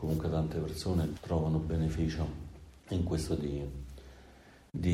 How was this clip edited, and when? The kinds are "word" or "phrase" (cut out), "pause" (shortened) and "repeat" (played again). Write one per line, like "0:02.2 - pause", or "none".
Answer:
0:01.1 - word
0:02.8 - pause
0:03.4 - word